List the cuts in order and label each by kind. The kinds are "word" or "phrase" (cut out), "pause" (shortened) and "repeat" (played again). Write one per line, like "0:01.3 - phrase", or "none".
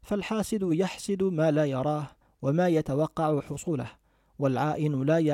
none